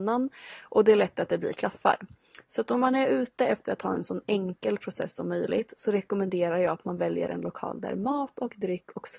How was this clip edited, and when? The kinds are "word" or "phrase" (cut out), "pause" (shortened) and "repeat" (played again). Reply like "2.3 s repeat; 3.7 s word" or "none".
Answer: none